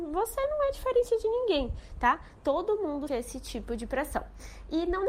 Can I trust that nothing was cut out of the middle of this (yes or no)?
no